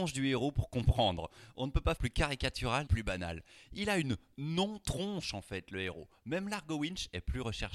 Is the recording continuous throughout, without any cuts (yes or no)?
no